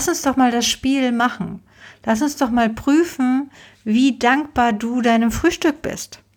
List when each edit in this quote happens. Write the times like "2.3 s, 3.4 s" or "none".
none